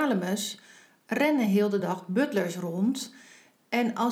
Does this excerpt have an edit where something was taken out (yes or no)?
no